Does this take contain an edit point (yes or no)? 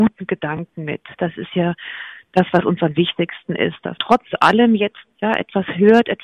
yes